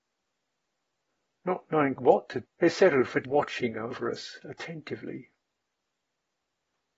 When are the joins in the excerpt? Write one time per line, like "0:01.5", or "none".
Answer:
0:02.0
0:02.4
0:03.2